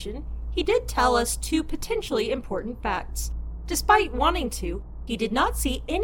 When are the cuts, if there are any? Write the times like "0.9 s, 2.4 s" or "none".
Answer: none